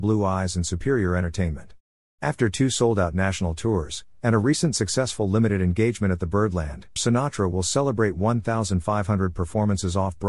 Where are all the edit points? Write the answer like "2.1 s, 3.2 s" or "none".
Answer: 7.0 s